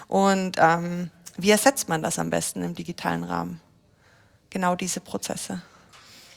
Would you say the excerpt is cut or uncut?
uncut